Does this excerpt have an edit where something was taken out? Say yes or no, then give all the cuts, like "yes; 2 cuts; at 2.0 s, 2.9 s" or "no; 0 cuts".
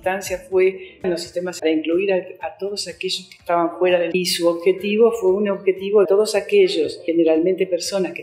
yes; 4 cuts; at 1.0 s, 1.6 s, 4.1 s, 6.0 s